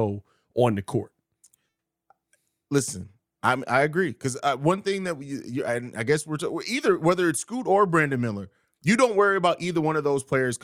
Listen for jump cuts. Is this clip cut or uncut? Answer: uncut